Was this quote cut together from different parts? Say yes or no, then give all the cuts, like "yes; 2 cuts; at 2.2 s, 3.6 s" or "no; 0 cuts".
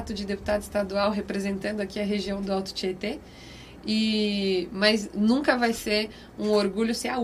no; 0 cuts